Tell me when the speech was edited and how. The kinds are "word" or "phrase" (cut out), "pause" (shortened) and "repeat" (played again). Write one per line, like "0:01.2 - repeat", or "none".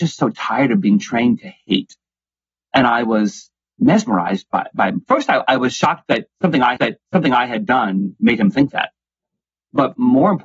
0:06.8 - repeat